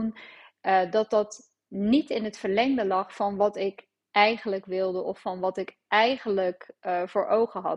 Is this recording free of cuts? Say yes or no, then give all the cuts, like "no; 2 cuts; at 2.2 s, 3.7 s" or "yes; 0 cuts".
yes; 0 cuts